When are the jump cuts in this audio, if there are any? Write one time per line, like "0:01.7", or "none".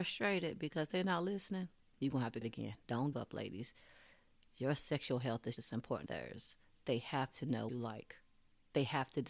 0:02.4
0:03.1
0:05.6
0:06.1
0:07.7